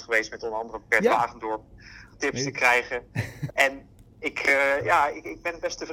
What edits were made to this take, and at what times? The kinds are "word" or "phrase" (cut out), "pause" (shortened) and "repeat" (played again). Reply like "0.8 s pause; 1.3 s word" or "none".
2.1 s word; 3.5 s word